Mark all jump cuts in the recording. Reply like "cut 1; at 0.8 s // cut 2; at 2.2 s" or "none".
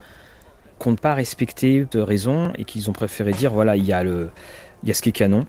cut 1; at 1.0 s // cut 2; at 1.9 s